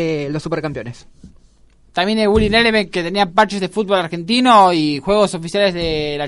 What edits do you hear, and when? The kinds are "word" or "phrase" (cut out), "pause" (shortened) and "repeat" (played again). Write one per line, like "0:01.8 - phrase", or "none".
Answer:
none